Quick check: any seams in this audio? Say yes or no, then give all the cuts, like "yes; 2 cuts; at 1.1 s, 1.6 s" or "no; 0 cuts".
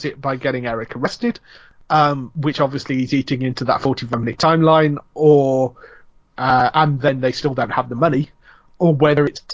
no; 0 cuts